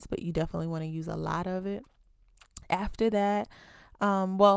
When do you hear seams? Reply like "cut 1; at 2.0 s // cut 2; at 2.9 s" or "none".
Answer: none